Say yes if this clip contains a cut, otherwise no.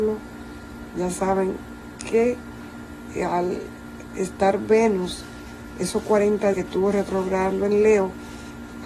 yes